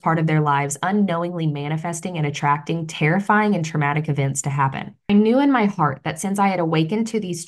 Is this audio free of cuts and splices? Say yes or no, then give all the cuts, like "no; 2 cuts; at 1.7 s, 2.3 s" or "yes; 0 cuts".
yes; 0 cuts